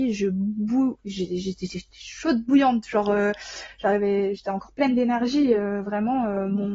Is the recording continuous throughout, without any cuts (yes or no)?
yes